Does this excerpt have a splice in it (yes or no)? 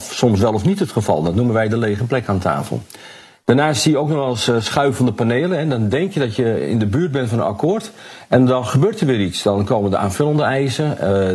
no